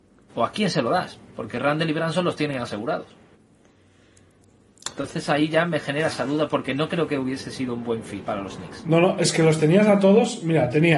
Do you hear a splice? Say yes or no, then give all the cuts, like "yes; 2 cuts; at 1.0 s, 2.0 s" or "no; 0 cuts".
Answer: yes; 1 cut; at 8.3 s